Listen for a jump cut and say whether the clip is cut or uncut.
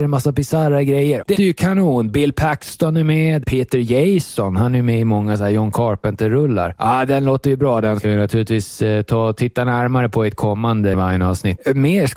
cut